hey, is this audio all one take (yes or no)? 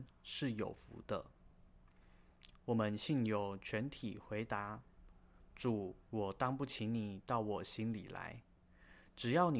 no